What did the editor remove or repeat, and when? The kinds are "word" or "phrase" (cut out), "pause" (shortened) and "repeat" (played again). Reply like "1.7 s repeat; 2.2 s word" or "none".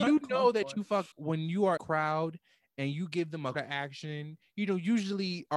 1.1 s word; 1.8 s phrase; 3.5 s word